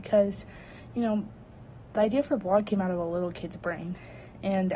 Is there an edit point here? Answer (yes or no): no